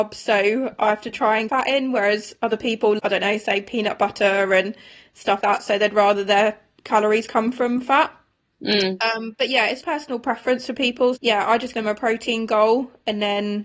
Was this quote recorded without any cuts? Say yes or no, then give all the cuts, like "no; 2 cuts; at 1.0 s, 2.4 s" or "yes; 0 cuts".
no; 6 cuts; at 1.5 s, 3.0 s, 5.4 s, 9.8 s, 11.2 s, 11.7 s